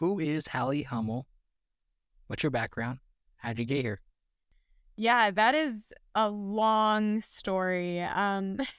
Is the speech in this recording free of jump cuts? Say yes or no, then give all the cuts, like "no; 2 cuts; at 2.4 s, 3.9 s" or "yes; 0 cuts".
yes; 0 cuts